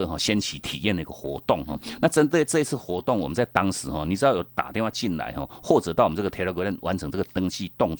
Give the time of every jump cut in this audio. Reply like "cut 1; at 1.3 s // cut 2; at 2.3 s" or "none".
none

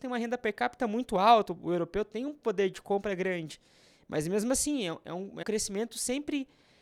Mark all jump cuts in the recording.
cut 1; at 5.4 s

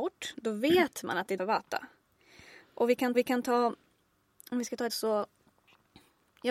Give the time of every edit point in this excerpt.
cut 1; at 1.4 s // cut 2; at 3.1 s // cut 3; at 4.9 s

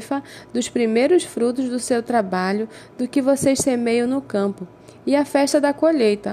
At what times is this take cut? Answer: none

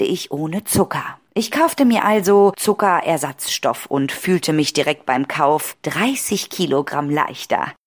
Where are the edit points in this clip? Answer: none

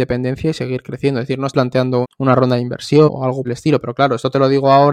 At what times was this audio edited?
cut 1; at 1.5 s // cut 2; at 2.0 s // cut 3; at 3.1 s // cut 4; at 3.4 s

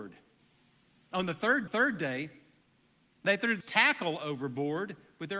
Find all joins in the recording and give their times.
cut 1; at 1.7 s // cut 2; at 3.6 s

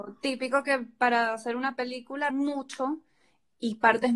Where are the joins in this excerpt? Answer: cut 1; at 2.3 s

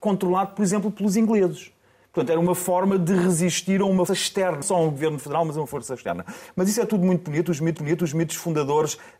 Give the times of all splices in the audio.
cut 1; at 4.1 s // cut 2; at 4.6 s // cut 3; at 7.8 s

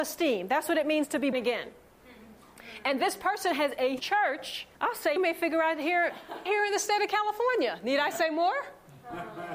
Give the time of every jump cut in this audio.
cut 1; at 1.3 s // cut 2; at 4.0 s // cut 3; at 4.7 s // cut 4; at 5.2 s // cut 5; at 6.5 s

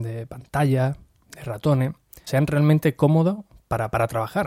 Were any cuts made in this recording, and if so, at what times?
cut 1; at 2.3 s

